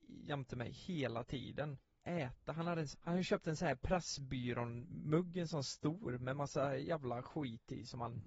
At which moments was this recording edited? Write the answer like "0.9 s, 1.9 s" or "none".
2.0 s, 2.9 s